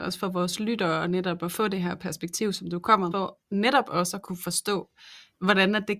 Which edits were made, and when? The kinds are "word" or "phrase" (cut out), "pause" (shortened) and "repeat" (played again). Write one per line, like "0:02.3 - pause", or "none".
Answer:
0:03.1 - word